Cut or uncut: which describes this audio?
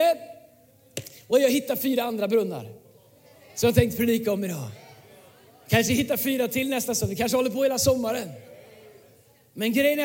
uncut